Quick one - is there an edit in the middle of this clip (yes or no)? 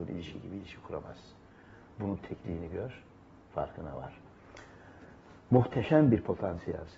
no